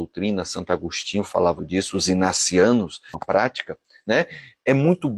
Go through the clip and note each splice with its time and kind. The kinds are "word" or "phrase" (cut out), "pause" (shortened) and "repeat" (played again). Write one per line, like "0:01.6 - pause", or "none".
0:01.6 - word
0:03.1 - phrase

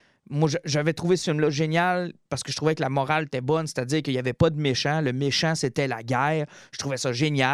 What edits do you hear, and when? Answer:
none

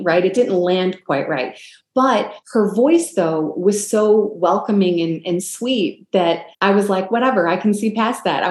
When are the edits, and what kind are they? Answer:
0:02.4 - pause
0:06.5 - pause

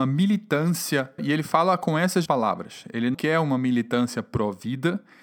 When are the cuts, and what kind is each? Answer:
0:01.2 - word
0:02.3 - word
0:03.1 - word

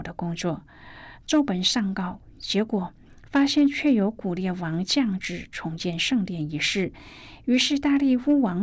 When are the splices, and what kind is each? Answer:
none

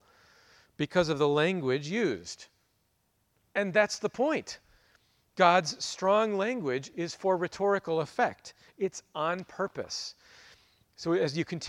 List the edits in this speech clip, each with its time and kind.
none

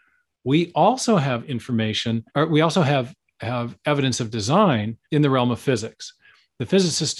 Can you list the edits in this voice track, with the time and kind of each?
0:02.3 - pause
0:05.0 - pause

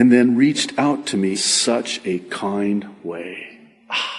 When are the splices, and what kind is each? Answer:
0:01.3 - word

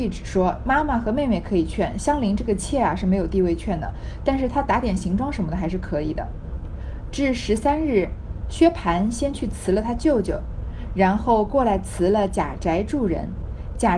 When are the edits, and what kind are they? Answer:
none

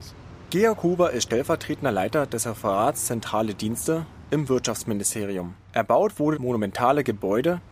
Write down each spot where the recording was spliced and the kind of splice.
0:05.6 - pause
0:06.3 - word

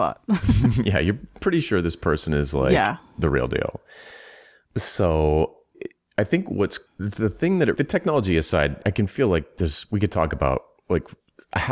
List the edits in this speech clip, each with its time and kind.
0:05.7 - word
0:06.9 - pause
0:07.8 - phrase
0:08.8 - word

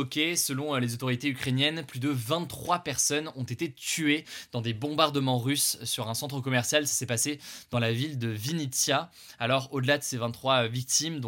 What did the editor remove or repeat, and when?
none

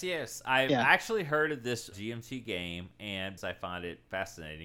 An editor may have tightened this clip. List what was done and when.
0:01.9 - word
0:03.4 - word

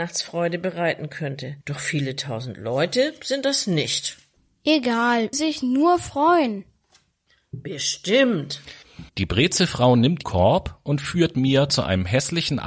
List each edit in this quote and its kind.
0:01.6 - pause
0:05.3 - phrase
0:09.1 - pause
0:10.2 - word

